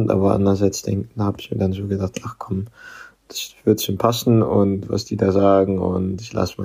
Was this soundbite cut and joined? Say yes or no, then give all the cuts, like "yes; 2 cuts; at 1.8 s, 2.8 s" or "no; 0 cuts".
no; 0 cuts